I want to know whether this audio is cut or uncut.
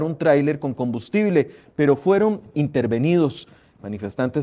uncut